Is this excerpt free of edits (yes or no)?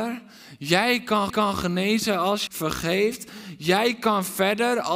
no